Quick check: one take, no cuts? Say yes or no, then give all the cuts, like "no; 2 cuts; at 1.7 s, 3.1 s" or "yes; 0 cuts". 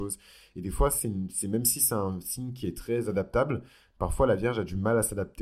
yes; 0 cuts